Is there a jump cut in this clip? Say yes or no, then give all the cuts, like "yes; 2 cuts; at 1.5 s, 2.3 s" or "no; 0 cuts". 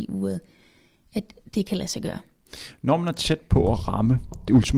no; 0 cuts